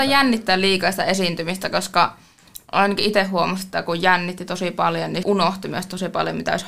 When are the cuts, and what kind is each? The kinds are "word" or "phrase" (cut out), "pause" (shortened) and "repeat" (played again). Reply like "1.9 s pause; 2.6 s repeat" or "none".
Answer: 5.2 s word